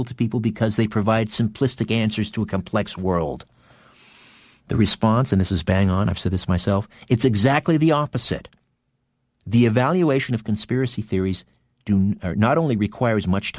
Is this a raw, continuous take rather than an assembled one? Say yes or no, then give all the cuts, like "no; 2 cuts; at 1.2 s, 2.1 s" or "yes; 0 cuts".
yes; 0 cuts